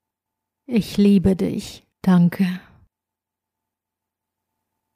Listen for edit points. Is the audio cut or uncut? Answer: cut